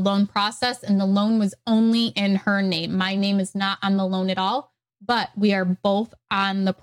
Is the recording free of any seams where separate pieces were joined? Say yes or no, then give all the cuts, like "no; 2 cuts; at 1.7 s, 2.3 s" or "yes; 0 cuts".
yes; 0 cuts